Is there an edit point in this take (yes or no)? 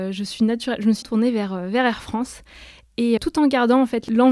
yes